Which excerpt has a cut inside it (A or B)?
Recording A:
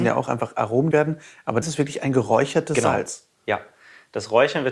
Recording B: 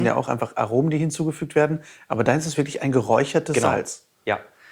A